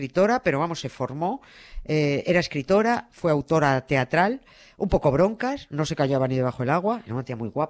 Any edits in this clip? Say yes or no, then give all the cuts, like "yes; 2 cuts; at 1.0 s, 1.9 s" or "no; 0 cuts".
no; 0 cuts